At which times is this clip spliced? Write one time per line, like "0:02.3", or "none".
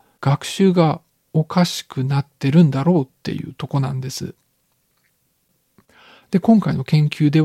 none